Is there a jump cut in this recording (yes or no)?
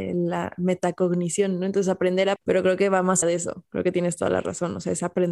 yes